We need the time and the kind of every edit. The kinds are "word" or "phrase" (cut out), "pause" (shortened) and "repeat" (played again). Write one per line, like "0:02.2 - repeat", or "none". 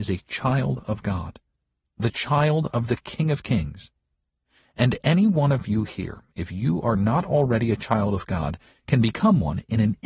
none